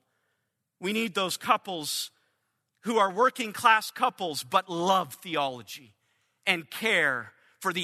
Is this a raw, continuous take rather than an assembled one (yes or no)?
yes